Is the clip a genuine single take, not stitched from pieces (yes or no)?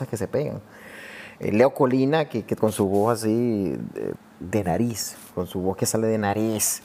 yes